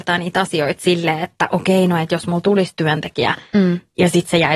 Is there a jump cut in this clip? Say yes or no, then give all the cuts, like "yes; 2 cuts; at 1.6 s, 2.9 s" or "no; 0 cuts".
no; 0 cuts